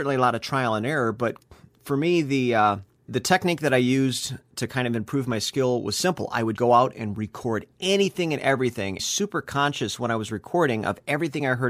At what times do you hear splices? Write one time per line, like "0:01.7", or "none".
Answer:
0:03.1
0:06.6
0:09.0